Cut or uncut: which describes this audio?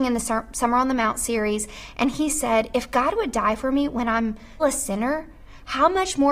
cut